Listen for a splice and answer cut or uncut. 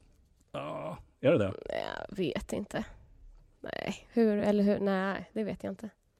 uncut